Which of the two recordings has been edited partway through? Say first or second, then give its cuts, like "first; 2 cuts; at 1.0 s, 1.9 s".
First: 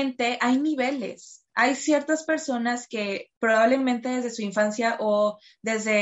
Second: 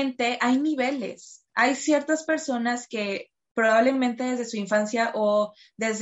first; 1 cut; at 3.4 s